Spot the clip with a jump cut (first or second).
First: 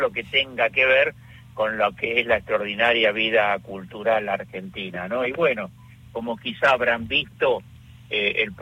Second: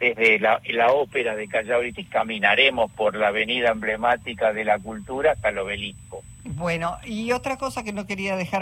second